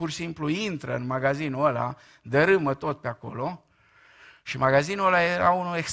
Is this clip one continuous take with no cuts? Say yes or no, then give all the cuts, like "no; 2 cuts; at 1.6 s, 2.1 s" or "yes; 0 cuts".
yes; 0 cuts